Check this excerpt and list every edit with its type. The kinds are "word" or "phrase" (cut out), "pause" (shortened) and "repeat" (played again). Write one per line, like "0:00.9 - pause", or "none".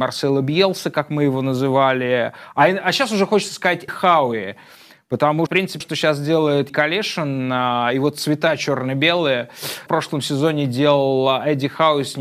0:03.9 - word
0:05.5 - word
0:05.8 - word
0:06.7 - word
0:09.9 - phrase